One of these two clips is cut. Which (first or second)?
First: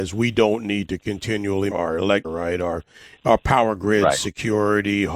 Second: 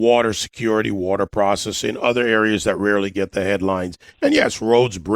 first